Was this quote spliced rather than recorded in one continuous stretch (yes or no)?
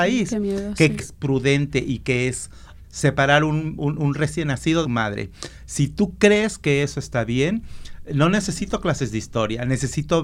yes